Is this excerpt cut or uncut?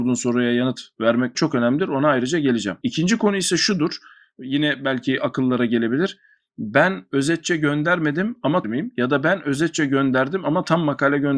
cut